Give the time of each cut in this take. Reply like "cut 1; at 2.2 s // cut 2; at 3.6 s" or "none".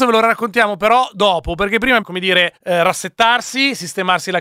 cut 1; at 2.0 s // cut 2; at 2.6 s